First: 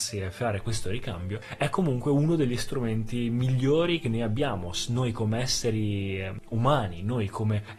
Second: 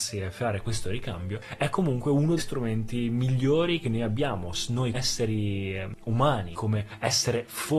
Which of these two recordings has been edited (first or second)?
second